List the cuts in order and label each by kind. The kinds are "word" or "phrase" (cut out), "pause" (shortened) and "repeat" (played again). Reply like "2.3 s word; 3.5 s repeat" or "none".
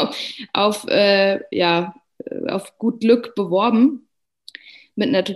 none